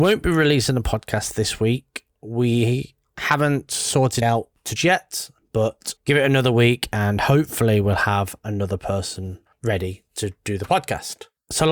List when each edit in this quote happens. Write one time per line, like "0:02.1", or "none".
0:02.1
0:04.2
0:04.8
0:06.0
0:09.5